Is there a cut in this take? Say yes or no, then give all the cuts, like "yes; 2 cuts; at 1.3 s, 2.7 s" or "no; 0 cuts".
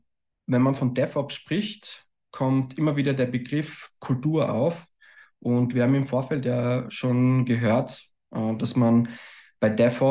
no; 0 cuts